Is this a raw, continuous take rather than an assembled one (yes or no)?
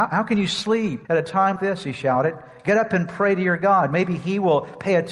no